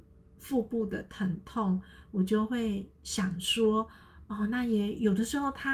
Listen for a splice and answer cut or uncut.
uncut